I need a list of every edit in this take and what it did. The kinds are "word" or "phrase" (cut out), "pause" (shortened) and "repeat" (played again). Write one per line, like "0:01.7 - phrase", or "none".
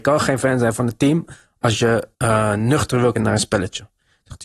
0:02.1 - pause
0:03.1 - word